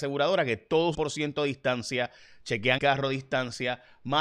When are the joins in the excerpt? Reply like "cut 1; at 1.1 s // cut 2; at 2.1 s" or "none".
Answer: cut 1; at 0.9 s // cut 2; at 2.8 s